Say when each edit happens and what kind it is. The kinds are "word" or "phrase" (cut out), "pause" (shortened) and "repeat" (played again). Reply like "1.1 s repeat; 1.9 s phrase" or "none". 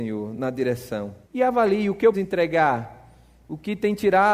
1.2 s pause; 2.1 s word